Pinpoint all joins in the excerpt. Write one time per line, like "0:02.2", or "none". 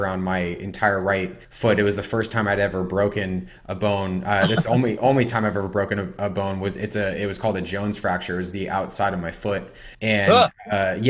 0:01.4
0:09.9